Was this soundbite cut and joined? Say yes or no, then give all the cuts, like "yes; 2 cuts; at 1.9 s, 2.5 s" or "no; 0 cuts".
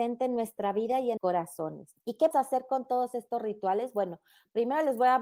yes; 3 cuts; at 1.2 s, 2.0 s, 2.3 s